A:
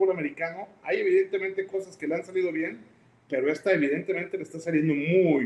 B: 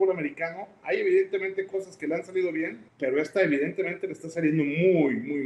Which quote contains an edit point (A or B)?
B